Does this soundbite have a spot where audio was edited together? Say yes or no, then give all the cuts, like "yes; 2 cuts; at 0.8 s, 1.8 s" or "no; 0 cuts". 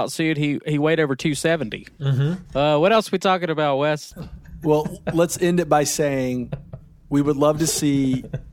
no; 0 cuts